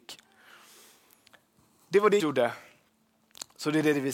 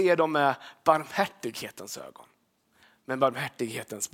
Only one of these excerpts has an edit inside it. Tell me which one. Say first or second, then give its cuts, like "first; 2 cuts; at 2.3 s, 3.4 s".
first; 1 cut; at 2.2 s